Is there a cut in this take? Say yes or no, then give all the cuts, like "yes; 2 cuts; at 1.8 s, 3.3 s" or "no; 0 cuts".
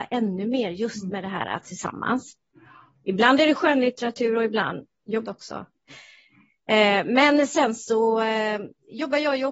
yes; 2 cuts; at 1.6 s, 5.2 s